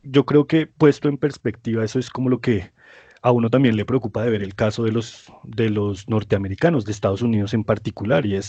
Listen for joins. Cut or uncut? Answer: uncut